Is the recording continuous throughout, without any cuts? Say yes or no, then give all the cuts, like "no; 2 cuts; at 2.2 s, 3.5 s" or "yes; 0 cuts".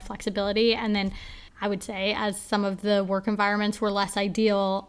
no; 1 cut; at 1.5 s